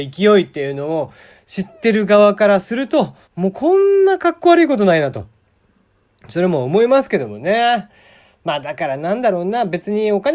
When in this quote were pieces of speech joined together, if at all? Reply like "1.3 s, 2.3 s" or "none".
3.2 s